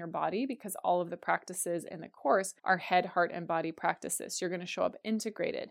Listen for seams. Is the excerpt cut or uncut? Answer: cut